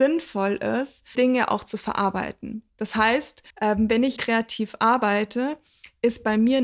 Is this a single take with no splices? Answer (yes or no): no